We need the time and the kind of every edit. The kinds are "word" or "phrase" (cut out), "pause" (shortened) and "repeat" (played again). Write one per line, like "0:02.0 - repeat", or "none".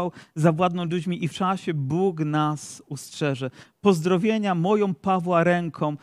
0:01.3 - phrase